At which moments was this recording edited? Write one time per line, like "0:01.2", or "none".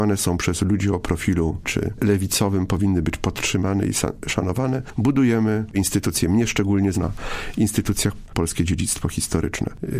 0:01.6
0:05.7
0:06.9
0:08.3